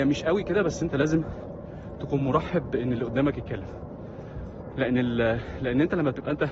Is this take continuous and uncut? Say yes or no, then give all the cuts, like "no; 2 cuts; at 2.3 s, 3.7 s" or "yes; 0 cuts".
yes; 0 cuts